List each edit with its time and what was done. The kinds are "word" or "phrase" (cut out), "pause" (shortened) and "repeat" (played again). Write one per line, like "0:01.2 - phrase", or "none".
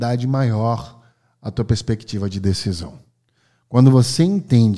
none